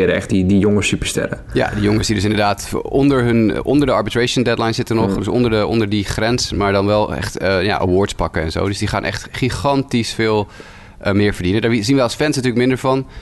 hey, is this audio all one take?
yes; 0 cuts

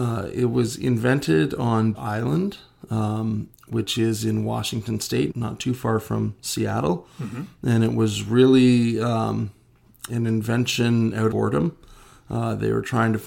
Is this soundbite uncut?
no; 4 cuts; at 1.9 s, 5.3 s, 10.1 s, 11.3 s

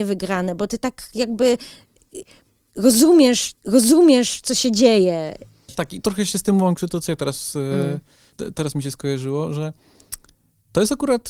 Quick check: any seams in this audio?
yes; 1 cut; at 3.5 s

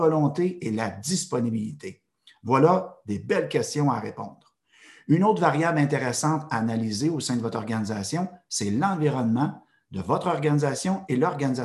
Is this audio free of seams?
yes; 0 cuts

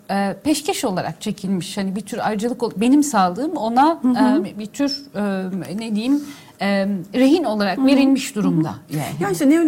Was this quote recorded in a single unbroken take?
yes; 0 cuts

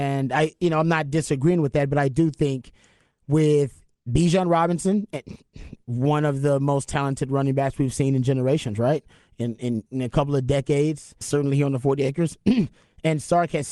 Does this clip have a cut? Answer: yes; 2 cuts; at 9.9 s, 11.2 s

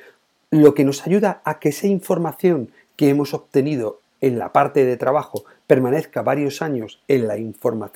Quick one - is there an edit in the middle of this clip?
no; 0 cuts

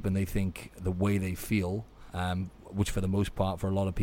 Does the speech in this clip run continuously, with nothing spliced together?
no; 1 cut; at 2.1 s

